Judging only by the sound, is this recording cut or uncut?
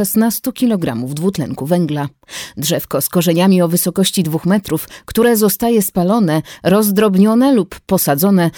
uncut